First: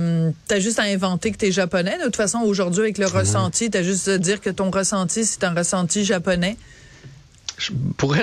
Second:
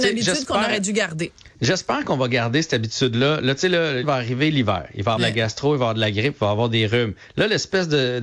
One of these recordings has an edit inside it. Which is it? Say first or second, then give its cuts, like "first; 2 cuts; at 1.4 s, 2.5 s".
second; 3 cuts; at 1.5 s, 4.0 s, 5.2 s